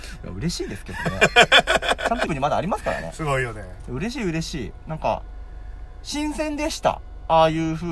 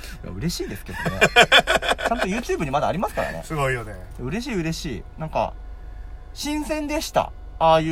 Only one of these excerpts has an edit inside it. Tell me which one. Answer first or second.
first